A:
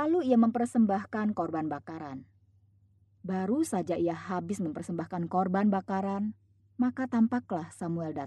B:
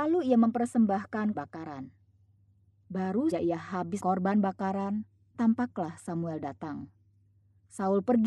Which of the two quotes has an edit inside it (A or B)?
B